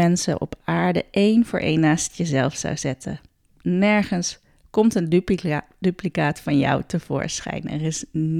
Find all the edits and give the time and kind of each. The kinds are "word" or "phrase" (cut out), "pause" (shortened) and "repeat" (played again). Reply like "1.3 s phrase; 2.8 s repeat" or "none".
none